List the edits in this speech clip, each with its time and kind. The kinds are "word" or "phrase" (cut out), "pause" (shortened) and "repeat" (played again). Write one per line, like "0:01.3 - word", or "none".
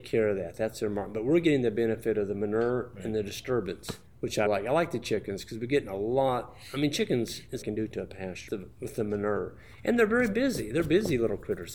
0:04.1 - pause
0:04.5 - word
0:07.6 - phrase
0:08.5 - word